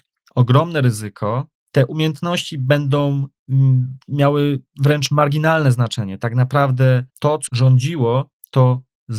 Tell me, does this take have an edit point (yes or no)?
yes